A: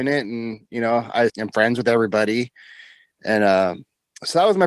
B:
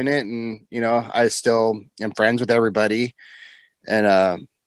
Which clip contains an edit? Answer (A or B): A